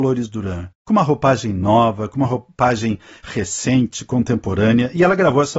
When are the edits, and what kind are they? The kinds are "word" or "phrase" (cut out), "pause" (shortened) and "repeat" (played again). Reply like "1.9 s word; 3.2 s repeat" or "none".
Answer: none